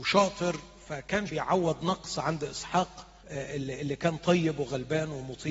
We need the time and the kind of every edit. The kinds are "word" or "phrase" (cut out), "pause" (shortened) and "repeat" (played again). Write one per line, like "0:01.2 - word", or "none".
0:01.3 - word
0:03.2 - pause

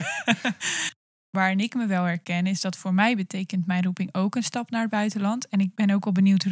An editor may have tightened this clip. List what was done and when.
none

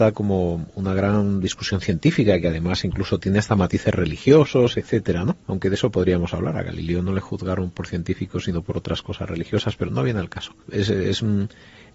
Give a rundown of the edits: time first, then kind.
0:05.4 - pause
0:09.9 - word
0:10.6 - pause

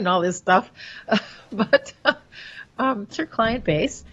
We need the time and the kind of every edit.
0:03.1 - phrase

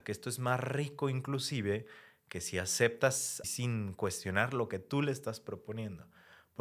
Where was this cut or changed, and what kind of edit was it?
0:03.4 - word

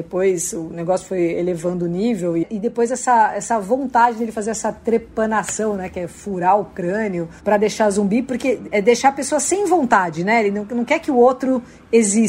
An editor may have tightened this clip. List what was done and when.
0:07.4 - pause
0:08.7 - word

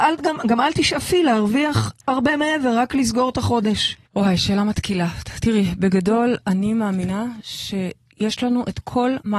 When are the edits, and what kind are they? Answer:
0:04.0 - pause

